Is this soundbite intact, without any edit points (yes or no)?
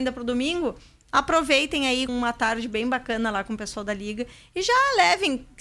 no